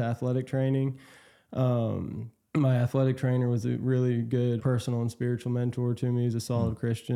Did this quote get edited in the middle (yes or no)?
yes